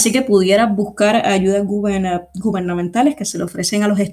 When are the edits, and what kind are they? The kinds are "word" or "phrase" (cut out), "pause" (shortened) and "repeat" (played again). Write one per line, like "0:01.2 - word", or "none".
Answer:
none